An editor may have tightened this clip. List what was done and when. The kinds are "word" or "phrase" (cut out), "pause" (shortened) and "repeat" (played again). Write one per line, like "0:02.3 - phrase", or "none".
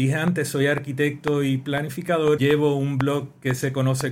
0:02.4 - word